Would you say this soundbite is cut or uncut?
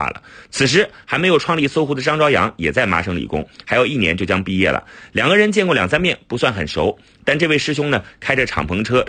uncut